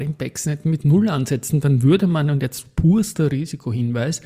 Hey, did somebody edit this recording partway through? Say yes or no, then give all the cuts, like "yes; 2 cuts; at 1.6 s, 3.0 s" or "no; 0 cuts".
no; 0 cuts